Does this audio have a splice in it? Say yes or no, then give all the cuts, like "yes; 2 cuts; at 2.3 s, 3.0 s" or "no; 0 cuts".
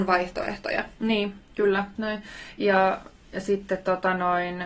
yes; 1 cut; at 2.0 s